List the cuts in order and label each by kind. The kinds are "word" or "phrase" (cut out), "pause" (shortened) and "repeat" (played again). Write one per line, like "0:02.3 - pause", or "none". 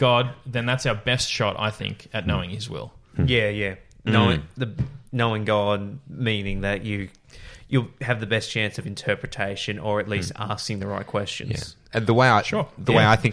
none